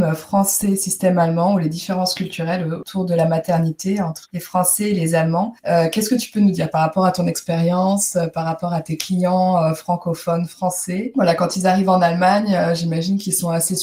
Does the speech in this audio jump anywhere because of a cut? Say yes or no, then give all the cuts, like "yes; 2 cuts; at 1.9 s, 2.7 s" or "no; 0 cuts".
yes; 1 cut; at 4.3 s